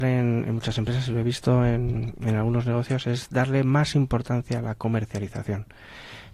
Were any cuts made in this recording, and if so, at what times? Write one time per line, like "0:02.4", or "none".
none